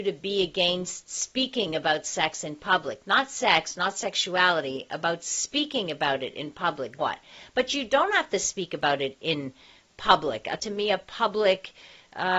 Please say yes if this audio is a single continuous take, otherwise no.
no